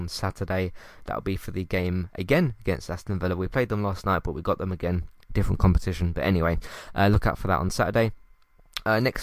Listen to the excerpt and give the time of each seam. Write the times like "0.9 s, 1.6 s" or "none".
none